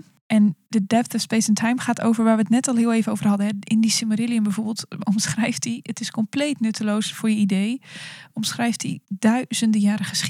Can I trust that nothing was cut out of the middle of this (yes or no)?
yes